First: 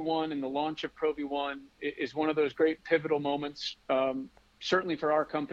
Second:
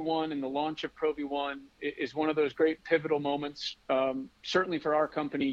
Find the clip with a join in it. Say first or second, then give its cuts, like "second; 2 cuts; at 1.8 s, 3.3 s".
second; 1 cut; at 4.3 s